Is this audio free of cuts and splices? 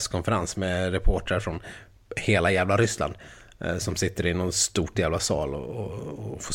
yes; 0 cuts

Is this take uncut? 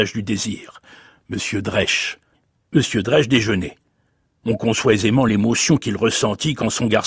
yes; 0 cuts

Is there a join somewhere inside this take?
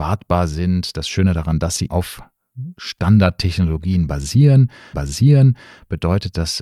yes; 2 cuts; at 1.9 s, 4.9 s

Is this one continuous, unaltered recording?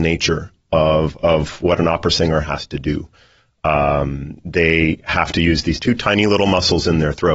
yes; 0 cuts

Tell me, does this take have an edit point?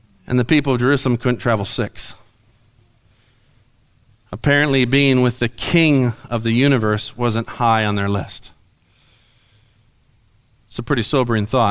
no; 0 cuts

